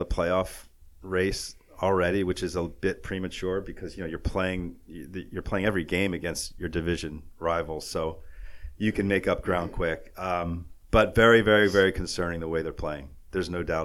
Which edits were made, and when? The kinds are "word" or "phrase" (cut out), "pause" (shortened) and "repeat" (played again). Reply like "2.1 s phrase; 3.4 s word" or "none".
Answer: 10.8 s pause